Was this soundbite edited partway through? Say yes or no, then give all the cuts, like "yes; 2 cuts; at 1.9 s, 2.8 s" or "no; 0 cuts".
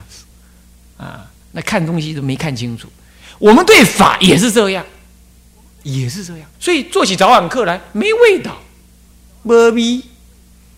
yes; 1 cut; at 6.5 s